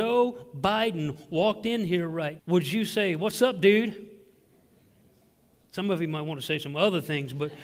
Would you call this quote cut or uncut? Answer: cut